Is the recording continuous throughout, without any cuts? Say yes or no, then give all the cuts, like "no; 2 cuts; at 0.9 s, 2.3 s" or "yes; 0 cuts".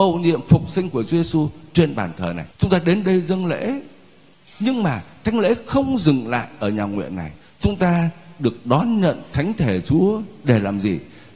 no; 3 cuts; at 2.5 s, 4.3 s, 7.4 s